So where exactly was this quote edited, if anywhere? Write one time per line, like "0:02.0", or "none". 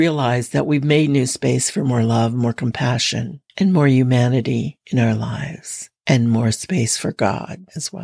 0:03.5